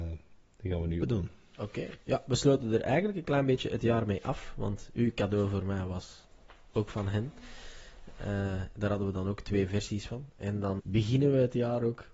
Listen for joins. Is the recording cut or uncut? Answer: cut